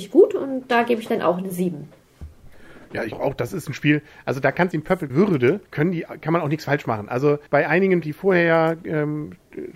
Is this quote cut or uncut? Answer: cut